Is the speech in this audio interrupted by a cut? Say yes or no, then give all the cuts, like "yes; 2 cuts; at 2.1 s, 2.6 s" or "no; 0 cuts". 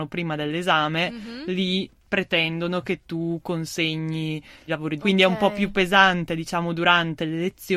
yes; 2 cuts; at 4.7 s, 5.0 s